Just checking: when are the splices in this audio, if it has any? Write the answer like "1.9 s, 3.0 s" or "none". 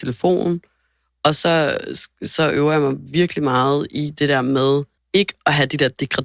5.0 s

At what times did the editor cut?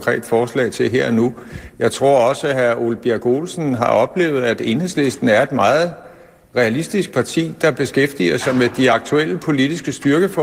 none

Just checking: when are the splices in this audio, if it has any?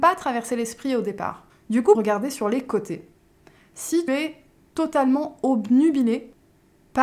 1.5 s, 1.9 s, 4.1 s

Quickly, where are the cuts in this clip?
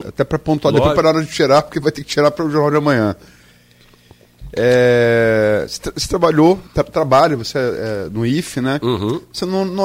6.7 s

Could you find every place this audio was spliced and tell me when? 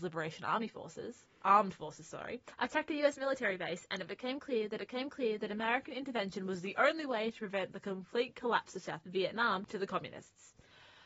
2.5 s, 4.8 s

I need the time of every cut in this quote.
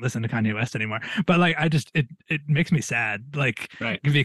none

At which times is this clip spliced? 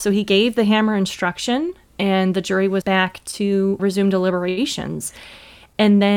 2.8 s, 3.8 s

